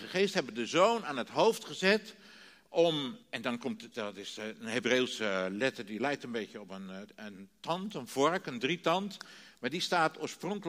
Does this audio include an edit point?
yes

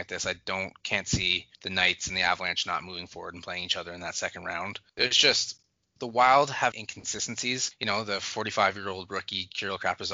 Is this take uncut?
no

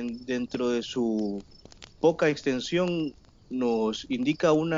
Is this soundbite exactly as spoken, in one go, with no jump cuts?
no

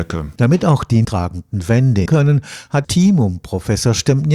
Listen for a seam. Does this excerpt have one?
yes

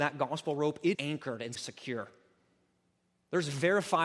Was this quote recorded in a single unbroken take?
no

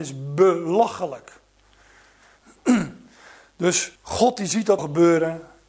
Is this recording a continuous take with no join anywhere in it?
no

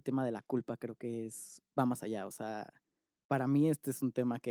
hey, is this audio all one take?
yes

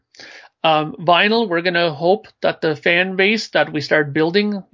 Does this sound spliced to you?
no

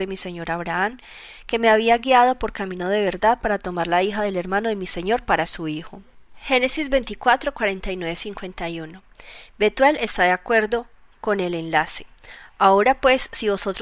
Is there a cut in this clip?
no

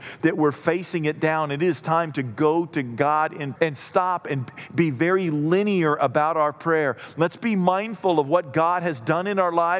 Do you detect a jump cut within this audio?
yes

